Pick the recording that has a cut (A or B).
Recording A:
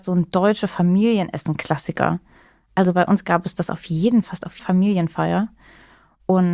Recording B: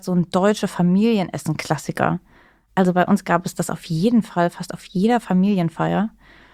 A